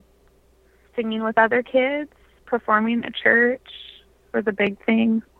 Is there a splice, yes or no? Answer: no